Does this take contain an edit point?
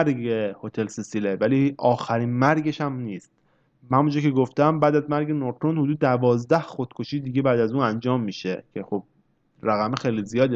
no; 0 cuts

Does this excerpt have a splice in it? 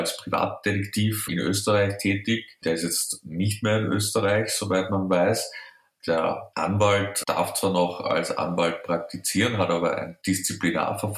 no; 0 cuts

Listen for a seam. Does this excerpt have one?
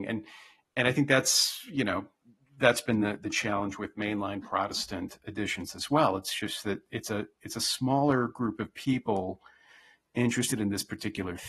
no; 0 cuts

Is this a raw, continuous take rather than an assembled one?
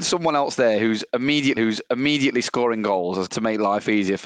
no; 2 cuts; at 1.6 s, 3.3 s

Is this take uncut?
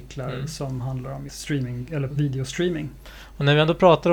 no; 2 cuts; at 1.3 s, 2.1 s

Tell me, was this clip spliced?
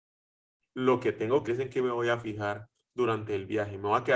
yes; 1 cut; at 1.5 s

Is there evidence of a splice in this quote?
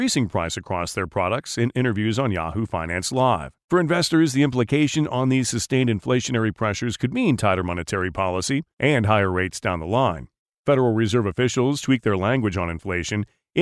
yes; 3 cuts; at 3.6 s, 8.7 s, 10.4 s

